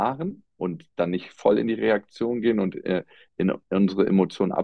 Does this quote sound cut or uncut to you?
uncut